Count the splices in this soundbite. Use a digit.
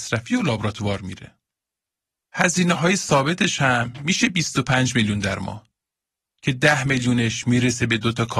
0